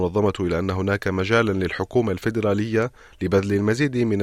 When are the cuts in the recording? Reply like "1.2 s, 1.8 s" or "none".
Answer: none